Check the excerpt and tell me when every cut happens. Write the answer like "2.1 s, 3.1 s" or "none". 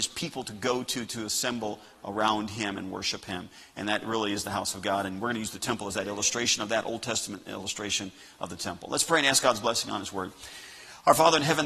none